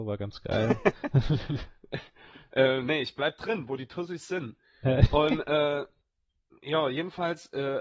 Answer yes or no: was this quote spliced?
no